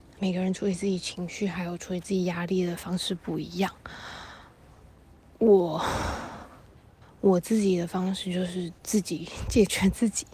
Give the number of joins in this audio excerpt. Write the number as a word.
two